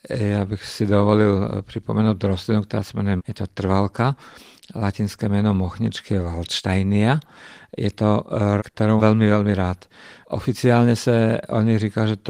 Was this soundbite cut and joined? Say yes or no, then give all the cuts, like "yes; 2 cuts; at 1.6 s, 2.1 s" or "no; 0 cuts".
yes; 3 cuts; at 3.2 s, 8.6 s, 9.0 s